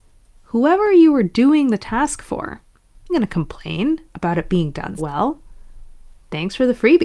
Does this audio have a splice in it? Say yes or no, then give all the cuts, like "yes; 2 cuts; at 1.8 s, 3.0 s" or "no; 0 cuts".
yes; 2 cuts; at 3.1 s, 5.0 s